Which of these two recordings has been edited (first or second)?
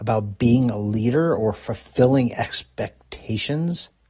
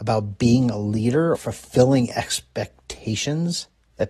second